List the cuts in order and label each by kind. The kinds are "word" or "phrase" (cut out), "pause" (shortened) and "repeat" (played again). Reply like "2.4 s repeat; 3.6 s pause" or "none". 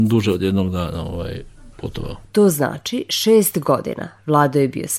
1.7 s pause

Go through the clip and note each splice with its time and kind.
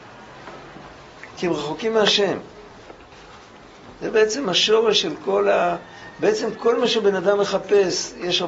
none

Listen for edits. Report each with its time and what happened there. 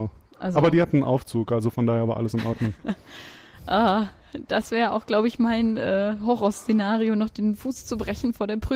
none

